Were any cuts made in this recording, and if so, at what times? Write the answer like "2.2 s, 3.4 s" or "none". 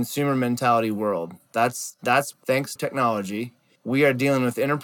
2.3 s, 2.8 s, 3.8 s